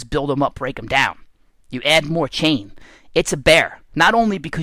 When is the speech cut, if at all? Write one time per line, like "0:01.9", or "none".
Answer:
none